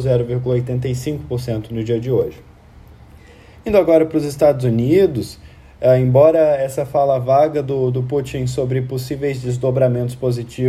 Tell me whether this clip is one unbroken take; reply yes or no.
yes